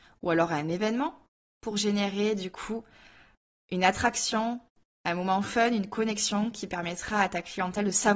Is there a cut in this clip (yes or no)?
no